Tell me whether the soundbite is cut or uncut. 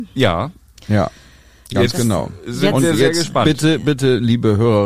uncut